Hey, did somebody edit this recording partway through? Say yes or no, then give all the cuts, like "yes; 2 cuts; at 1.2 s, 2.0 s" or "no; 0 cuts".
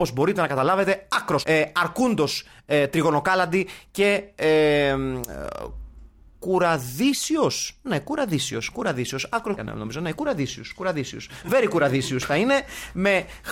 yes; 2 cuts; at 1.4 s, 9.6 s